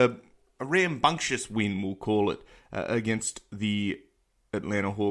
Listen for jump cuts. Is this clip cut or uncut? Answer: uncut